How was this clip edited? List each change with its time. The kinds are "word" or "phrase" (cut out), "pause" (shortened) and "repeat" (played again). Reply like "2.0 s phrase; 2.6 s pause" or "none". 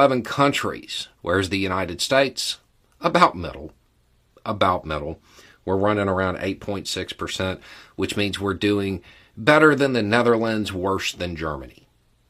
1.1 s pause